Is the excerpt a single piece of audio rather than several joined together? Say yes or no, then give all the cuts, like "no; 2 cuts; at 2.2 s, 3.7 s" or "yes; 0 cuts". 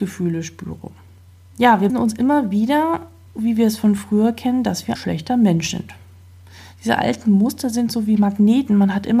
no; 3 cuts; at 1.9 s, 3.3 s, 5.0 s